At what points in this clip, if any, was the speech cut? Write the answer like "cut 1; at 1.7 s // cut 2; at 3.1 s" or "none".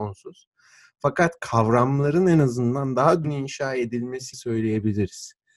cut 1; at 3.2 s // cut 2; at 4.3 s